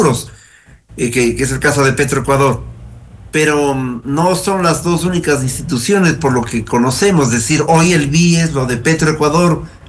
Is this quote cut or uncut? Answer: uncut